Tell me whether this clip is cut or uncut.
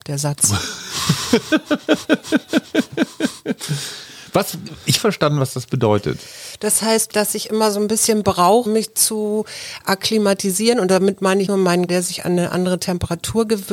cut